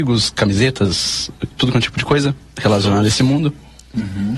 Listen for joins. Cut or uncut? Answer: cut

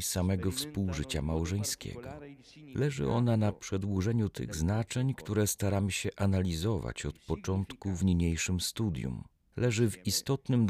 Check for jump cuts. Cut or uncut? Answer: uncut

